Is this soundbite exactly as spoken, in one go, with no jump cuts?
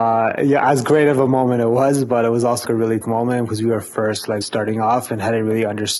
no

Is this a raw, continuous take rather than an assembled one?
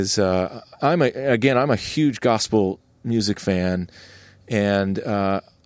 yes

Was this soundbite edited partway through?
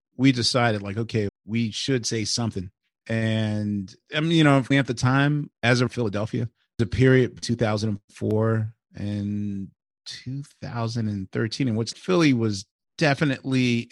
yes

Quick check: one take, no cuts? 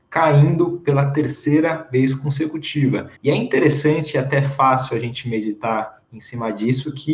no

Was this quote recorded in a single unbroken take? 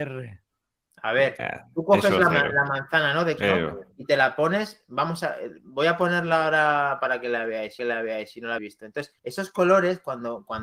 no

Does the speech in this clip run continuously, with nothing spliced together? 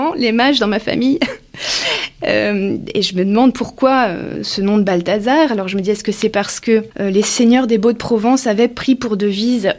yes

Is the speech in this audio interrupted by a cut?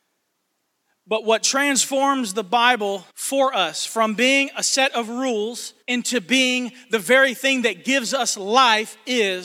yes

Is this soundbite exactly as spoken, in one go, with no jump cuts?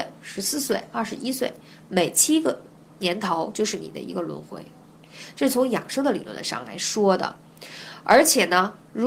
yes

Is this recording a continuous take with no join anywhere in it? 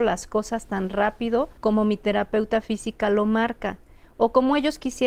no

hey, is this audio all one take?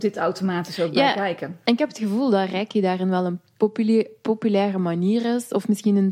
yes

